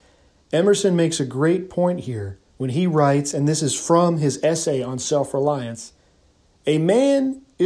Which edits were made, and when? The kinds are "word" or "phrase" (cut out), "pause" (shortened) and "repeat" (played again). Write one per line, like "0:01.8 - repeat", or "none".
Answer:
0:02.5 - pause